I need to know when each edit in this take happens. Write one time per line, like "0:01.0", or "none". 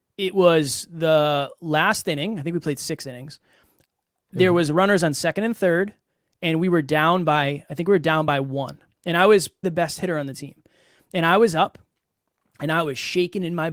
0:09.6